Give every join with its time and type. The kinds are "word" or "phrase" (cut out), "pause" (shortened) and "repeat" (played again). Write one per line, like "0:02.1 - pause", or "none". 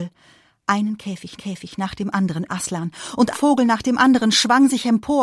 0:01.4 - repeat
0:02.5 - word
0:03.3 - word